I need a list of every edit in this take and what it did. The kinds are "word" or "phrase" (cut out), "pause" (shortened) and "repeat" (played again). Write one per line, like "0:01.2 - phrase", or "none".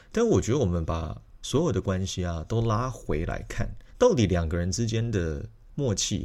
0:03.9 - pause